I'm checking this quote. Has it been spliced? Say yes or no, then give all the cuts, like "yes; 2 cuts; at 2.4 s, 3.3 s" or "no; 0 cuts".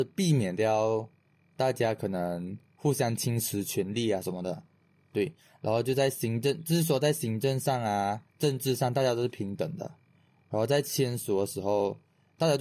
yes; 1 cut; at 8.3 s